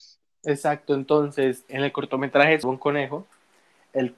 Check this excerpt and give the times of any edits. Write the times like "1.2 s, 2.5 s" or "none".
1.7 s, 2.6 s